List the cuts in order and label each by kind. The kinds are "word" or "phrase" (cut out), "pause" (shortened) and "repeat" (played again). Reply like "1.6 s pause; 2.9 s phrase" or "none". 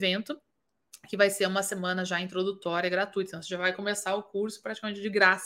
none

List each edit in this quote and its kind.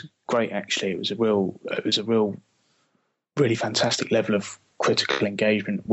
none

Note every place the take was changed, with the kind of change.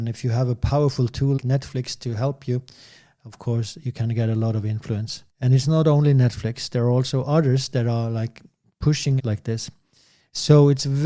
1.4 s word; 5.3 s pause; 9.2 s word

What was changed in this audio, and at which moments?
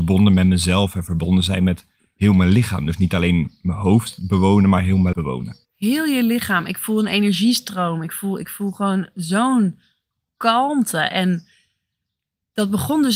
5.1 s word; 5.6 s pause

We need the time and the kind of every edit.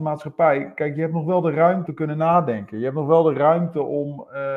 1.9 s word

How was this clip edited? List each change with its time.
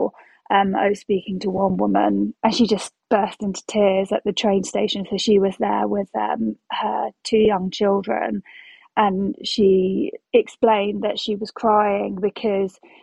2.4 s pause; 3.0 s pause; 10.3 s pause

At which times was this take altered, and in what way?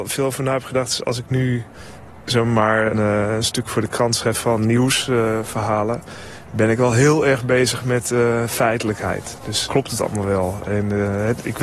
2.9 s word; 9.7 s word

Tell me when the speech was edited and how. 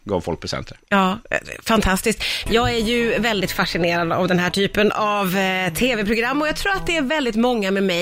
none

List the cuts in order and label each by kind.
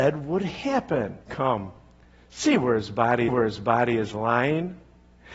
1.2 s pause; 3.3 s repeat

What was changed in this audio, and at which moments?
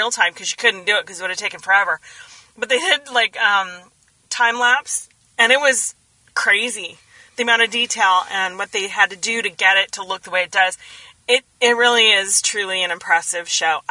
none

